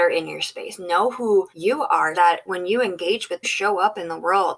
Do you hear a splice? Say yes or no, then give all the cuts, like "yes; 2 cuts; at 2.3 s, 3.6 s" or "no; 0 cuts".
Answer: yes; 3 cuts; at 1.5 s, 2.1 s, 3.4 s